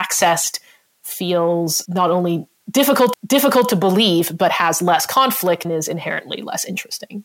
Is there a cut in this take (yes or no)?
yes